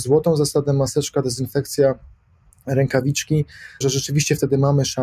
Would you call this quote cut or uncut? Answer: cut